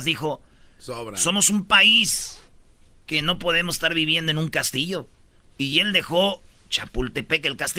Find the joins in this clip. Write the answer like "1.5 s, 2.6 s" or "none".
none